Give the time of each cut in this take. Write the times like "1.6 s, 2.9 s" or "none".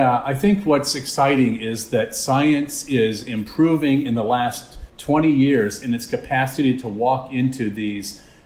4.9 s